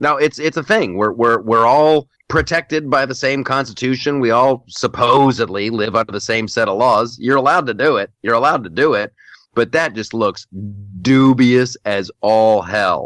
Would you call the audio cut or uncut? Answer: uncut